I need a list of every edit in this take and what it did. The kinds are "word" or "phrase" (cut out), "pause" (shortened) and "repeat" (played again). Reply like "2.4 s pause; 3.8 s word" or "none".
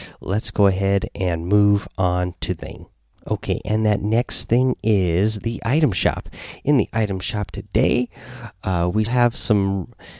2.6 s word; 3.1 s pause; 9.1 s word